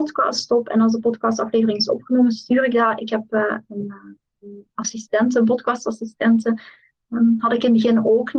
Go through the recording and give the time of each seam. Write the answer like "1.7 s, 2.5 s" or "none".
none